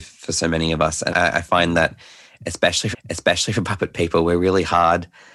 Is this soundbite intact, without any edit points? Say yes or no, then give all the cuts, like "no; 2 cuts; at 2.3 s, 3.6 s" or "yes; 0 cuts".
no; 2 cuts; at 1.1 s, 2.9 s